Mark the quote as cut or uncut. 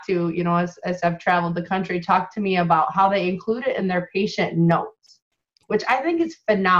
uncut